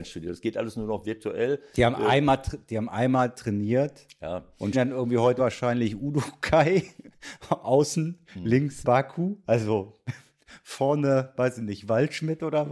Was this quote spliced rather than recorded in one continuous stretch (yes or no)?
yes